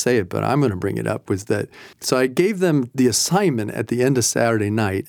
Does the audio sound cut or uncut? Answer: cut